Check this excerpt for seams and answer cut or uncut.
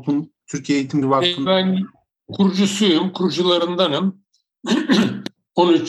cut